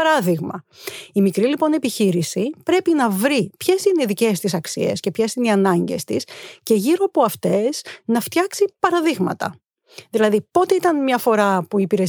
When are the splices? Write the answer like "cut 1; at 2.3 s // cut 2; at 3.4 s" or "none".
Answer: cut 1; at 10.5 s

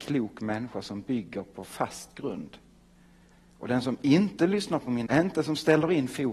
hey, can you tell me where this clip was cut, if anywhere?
cut 1; at 5.1 s

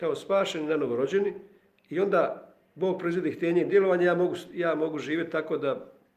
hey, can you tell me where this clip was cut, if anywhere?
none

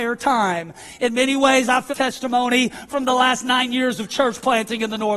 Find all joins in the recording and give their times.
cut 1; at 1.9 s

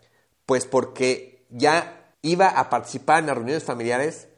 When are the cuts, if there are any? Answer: cut 1; at 2.1 s

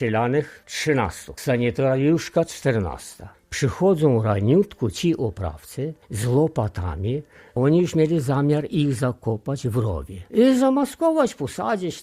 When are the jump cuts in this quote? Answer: cut 1; at 6.0 s

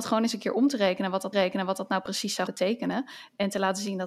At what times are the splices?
cut 1; at 1.3 s // cut 2; at 2.5 s

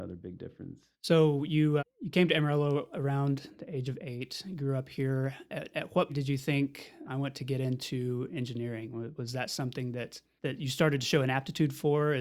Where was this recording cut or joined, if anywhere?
cut 1; at 0.9 s // cut 2; at 1.8 s // cut 3; at 6.1 s // cut 4; at 7.1 s

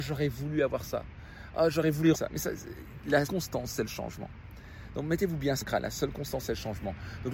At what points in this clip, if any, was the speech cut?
cut 1; at 2.1 s // cut 2; at 3.3 s // cut 3; at 5.6 s

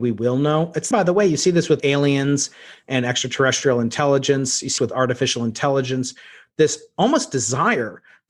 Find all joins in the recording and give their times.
cut 1; at 0.9 s // cut 2; at 1.8 s // cut 3; at 4.8 s

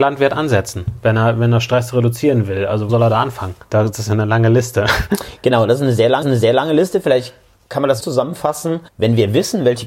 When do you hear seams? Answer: cut 1; at 2.9 s // cut 2; at 3.6 s // cut 3; at 6.2 s // cut 4; at 8.0 s // cut 5; at 8.9 s

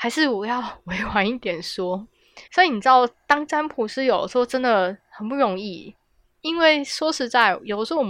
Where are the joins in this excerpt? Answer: cut 1; at 2.5 s

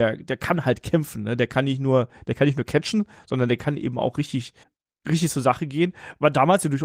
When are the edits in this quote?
cut 1; at 4.6 s

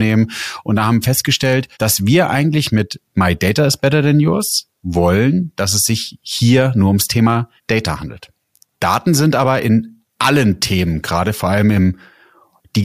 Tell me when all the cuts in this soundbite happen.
cut 1; at 1.7 s // cut 2; at 7.6 s // cut 3; at 10.1 s

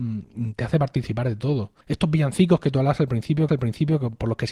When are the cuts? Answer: cut 1; at 1.8 s // cut 2; at 3.5 s

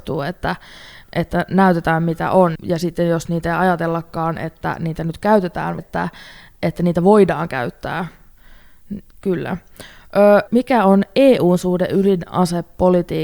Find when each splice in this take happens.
cut 1; at 2.6 s // cut 2; at 5.8 s // cut 3; at 10.5 s

